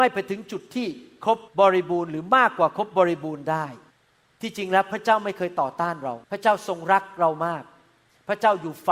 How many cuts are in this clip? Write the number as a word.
three